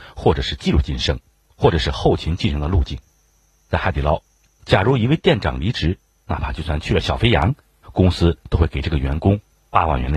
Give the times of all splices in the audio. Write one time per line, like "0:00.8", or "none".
none